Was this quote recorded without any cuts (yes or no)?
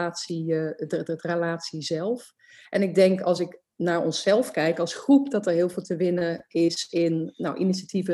yes